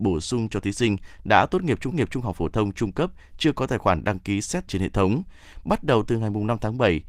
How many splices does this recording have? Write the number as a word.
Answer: two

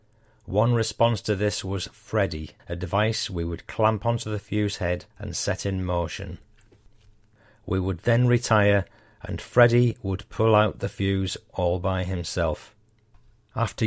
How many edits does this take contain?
two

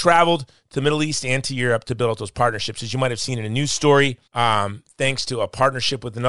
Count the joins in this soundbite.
one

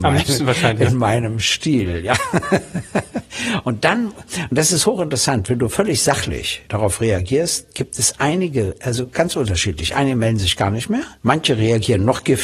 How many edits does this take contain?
two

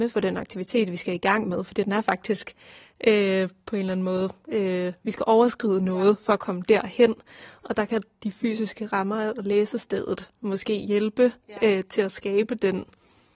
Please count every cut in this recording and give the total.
zero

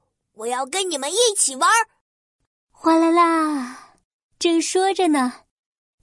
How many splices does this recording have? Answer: zero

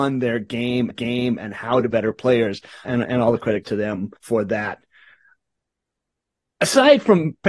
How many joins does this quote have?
five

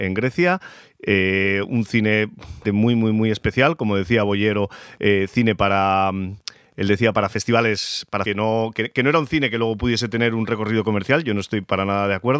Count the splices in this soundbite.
two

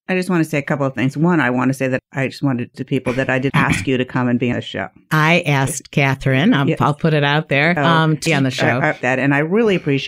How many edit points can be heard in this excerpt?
six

